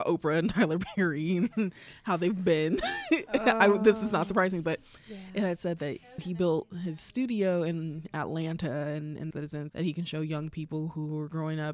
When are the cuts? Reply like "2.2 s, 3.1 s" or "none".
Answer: 6.2 s, 9.3 s, 9.7 s